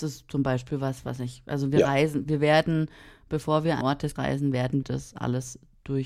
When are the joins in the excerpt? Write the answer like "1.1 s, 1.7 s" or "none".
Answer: 3.8 s, 4.2 s, 4.8 s